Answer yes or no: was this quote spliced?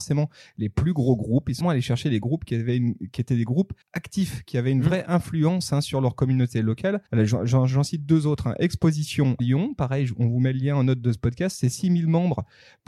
yes